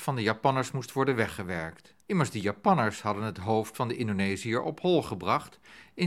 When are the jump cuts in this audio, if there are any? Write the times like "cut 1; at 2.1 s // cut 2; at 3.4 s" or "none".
cut 1; at 2.0 s